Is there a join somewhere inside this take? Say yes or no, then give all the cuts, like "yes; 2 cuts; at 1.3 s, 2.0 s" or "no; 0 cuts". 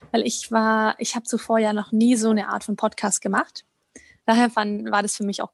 no; 0 cuts